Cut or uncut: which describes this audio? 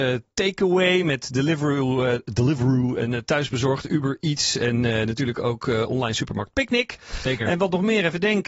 uncut